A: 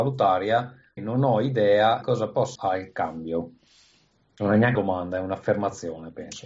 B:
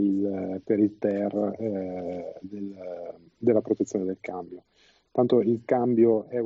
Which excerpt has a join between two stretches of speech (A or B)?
A